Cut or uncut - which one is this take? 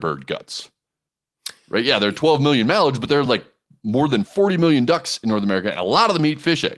uncut